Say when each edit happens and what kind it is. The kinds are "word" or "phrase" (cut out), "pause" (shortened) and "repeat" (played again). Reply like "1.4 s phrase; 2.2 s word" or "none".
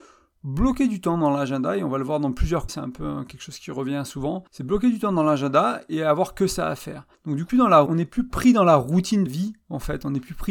2.7 s word; 4.5 s pause; 7.1 s pause; 7.5 s phrase; 7.9 s word; 9.3 s word